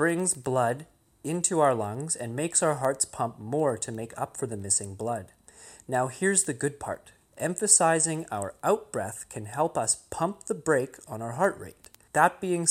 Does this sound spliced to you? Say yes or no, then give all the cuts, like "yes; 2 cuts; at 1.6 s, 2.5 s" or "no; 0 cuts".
no; 0 cuts